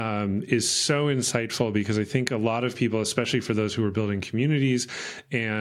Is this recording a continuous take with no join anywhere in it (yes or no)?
yes